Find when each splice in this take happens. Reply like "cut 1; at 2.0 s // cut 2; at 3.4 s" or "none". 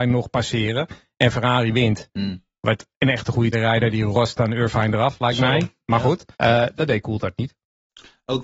cut 1; at 3.5 s // cut 2; at 6.3 s